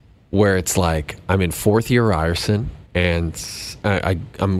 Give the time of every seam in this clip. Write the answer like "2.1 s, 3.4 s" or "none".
2.9 s